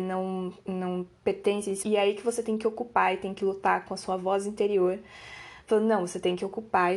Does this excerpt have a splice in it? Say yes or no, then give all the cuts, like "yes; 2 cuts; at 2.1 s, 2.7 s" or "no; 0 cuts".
yes; 1 cut; at 1.8 s